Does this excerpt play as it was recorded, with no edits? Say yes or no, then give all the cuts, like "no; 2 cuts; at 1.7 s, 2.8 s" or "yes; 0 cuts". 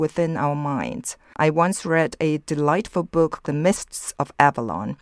no; 1 cut; at 3.4 s